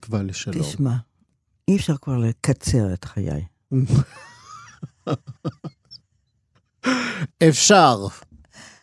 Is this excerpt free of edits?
yes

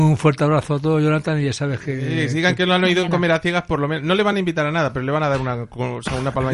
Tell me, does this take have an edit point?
no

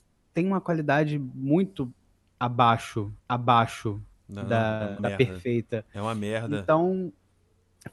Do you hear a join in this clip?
yes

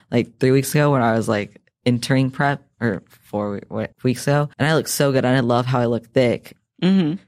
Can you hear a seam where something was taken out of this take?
yes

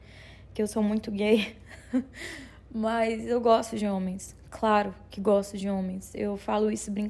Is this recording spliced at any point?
no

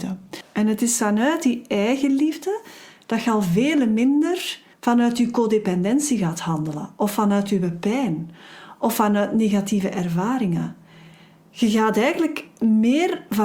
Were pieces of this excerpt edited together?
yes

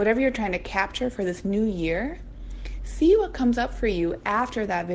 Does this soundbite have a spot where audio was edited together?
no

